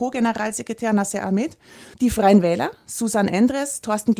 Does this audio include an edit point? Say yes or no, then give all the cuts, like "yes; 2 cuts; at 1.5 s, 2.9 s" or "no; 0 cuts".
yes; 1 cut; at 1.9 s